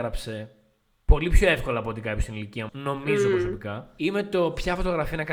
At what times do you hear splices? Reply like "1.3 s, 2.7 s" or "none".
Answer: 2.7 s